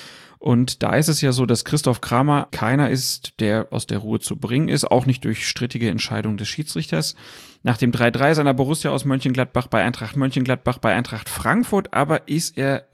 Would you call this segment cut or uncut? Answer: cut